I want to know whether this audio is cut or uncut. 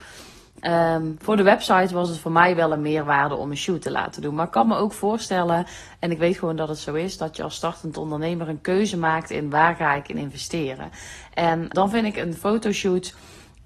cut